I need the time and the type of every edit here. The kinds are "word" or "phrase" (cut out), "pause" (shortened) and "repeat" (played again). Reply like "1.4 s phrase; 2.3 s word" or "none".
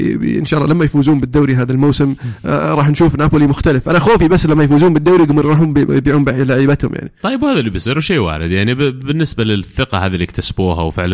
none